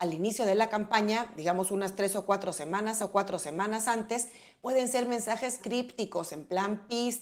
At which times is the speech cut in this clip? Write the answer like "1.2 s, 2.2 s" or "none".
3.0 s, 5.6 s